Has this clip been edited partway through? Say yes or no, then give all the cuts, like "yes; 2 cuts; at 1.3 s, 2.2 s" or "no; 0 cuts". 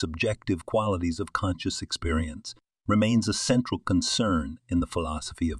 no; 0 cuts